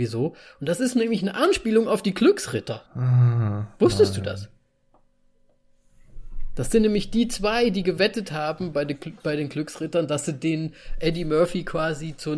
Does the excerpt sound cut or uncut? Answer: cut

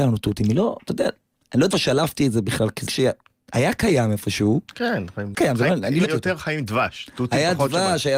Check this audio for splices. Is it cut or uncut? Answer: cut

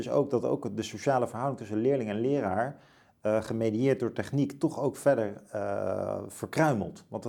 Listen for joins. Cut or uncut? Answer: uncut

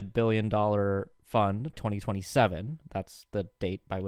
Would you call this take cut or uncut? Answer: cut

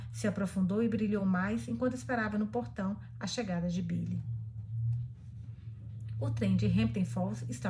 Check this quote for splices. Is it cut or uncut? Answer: uncut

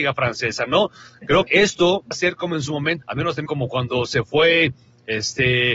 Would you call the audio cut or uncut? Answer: cut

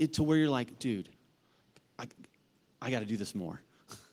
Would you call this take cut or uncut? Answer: uncut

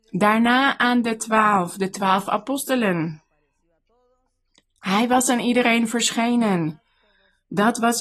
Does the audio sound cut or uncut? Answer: uncut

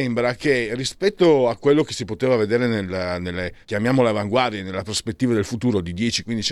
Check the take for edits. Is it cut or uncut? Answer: cut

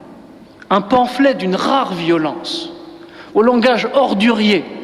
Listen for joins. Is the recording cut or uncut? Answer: uncut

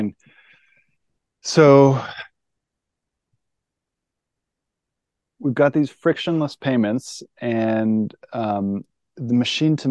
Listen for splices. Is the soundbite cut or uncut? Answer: uncut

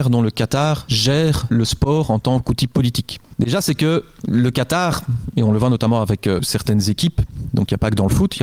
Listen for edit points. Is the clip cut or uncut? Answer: uncut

